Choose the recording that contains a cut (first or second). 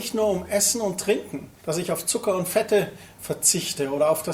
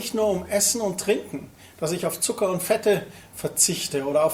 first